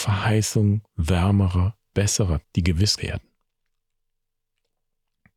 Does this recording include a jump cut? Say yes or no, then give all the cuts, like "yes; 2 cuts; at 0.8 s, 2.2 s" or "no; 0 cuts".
yes; 3 cuts; at 1.9 s, 2.4 s, 3.0 s